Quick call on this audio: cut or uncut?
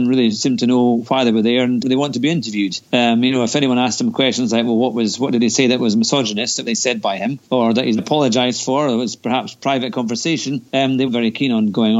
cut